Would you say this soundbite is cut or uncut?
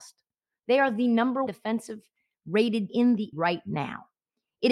cut